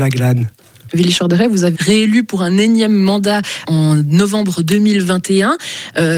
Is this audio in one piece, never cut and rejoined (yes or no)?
no